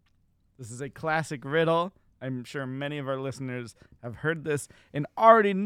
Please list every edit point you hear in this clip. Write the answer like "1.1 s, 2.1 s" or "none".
none